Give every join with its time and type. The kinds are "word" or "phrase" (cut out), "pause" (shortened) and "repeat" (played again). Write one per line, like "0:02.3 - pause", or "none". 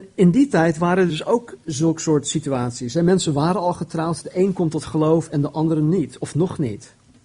0:01.1 - word